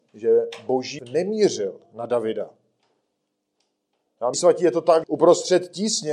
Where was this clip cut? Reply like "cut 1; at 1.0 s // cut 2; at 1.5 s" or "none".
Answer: cut 1; at 1.0 s // cut 2; at 4.3 s // cut 3; at 5.0 s